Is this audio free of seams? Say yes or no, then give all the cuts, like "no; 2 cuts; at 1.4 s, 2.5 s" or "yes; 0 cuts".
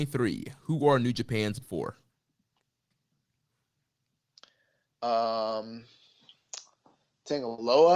no; 1 cut; at 1.6 s